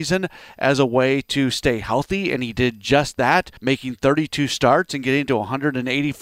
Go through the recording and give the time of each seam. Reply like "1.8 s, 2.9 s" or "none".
3.6 s